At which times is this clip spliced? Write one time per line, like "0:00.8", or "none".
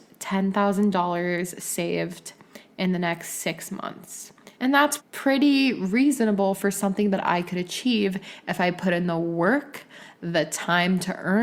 0:04.5
0:05.0